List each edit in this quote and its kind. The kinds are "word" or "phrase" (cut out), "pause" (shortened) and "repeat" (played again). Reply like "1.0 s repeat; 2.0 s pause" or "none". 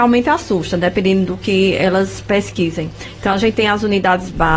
3.5 s word